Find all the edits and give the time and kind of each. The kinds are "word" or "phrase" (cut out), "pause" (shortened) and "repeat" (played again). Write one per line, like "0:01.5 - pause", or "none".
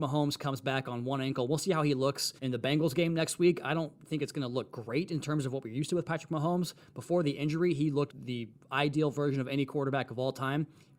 0:02.4 - pause
0:08.1 - word